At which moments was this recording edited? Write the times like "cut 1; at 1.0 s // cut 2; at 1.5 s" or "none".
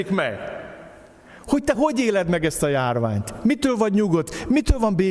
none